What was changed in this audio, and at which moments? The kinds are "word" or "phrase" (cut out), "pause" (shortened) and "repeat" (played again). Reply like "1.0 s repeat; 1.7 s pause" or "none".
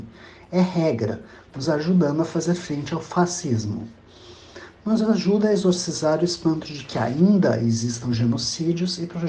none